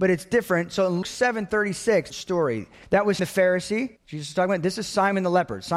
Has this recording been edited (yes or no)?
yes